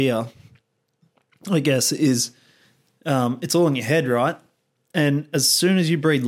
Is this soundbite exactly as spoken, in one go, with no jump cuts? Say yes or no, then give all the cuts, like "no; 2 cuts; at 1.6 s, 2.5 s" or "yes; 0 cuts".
yes; 0 cuts